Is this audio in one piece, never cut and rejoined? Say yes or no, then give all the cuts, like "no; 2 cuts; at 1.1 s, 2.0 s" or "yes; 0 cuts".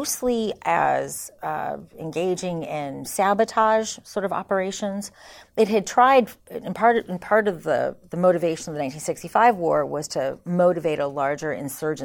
yes; 0 cuts